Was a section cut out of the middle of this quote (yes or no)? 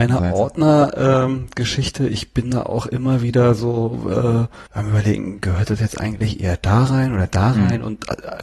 yes